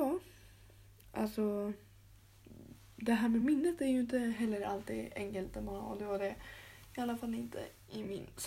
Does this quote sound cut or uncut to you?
uncut